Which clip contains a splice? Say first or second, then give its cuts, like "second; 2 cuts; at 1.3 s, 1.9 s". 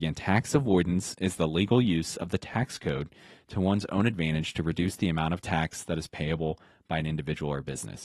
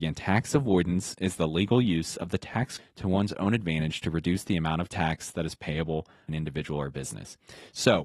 second; 2 cuts; at 2.8 s, 6.3 s